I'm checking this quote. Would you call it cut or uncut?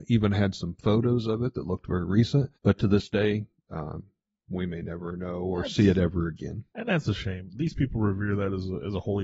cut